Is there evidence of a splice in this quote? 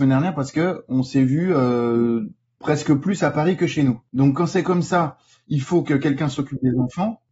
no; 0 cuts

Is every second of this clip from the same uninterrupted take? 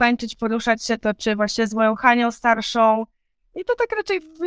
yes; 0 cuts

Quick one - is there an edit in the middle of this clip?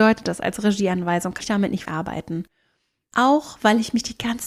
yes; 2 cuts; at 1.4 s, 1.9 s

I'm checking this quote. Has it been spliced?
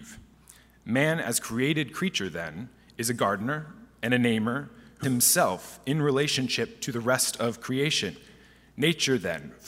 yes; 1 cut; at 5.0 s

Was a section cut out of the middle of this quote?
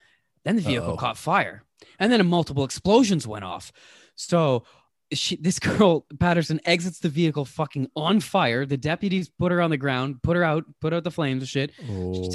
no; 0 cuts

